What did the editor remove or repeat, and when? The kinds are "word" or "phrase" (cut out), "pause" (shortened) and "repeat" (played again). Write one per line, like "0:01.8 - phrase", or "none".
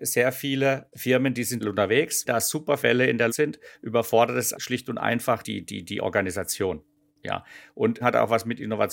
0:00.9 - word
0:01.6 - word
0:02.3 - word
0:02.8 - word
0:03.3 - word
0:04.5 - word
0:05.4 - word
0:08.0 - word

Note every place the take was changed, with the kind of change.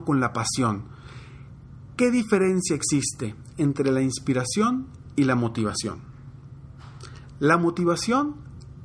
none

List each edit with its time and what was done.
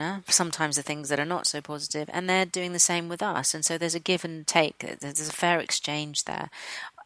none

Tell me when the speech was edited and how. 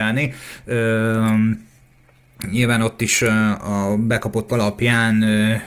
0:04.5 - word

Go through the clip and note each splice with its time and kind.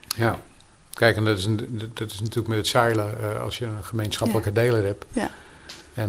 none

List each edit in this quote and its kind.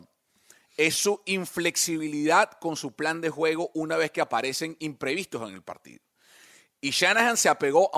none

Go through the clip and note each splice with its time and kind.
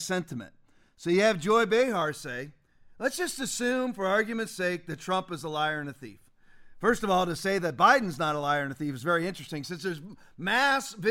none

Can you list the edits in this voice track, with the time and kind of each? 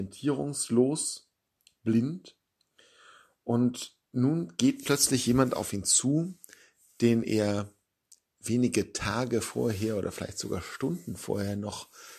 none

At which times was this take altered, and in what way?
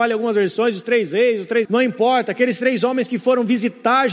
0:01.6 - phrase

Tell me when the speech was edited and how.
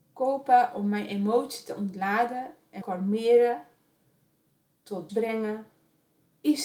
0:02.8 - word
0:05.1 - word

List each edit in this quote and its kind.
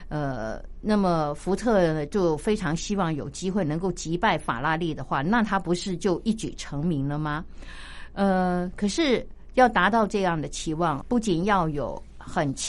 0:11.0 - word

